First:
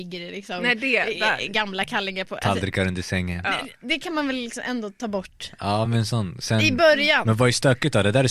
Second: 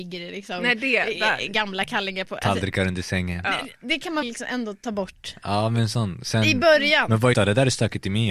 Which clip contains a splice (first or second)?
second